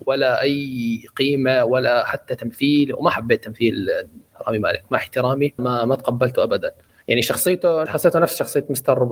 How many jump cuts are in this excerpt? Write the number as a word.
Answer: two